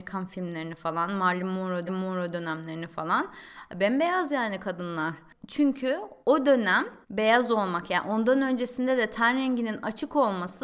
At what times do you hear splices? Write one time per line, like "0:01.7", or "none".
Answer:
0:01.9
0:06.2
0:07.0